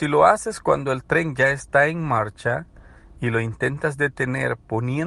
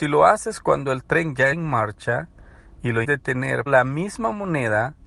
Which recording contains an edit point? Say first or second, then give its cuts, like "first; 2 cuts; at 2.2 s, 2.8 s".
second; 3 cuts; at 1.5 s, 3.0 s, 3.7 s